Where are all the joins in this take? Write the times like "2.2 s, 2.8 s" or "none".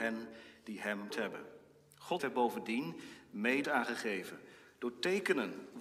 1.1 s, 2.2 s, 3.6 s